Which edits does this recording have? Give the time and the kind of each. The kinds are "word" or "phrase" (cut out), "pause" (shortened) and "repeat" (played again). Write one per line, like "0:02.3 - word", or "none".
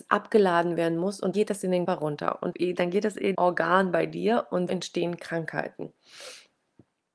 0:01.3 - word
0:01.9 - word
0:02.5 - word
0:03.3 - word
0:04.7 - word